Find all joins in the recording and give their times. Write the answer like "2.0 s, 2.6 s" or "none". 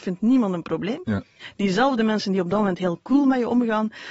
none